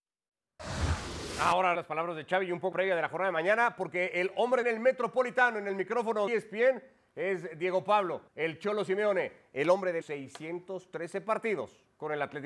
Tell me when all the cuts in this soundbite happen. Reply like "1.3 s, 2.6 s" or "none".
1.7 s, 2.7 s, 4.6 s, 6.3 s, 8.3 s, 10.0 s